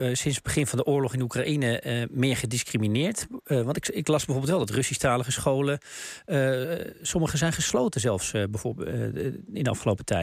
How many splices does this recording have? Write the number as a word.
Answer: zero